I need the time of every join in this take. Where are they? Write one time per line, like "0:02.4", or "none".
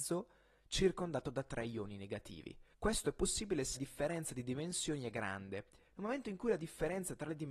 0:02.7
0:03.8
0:05.8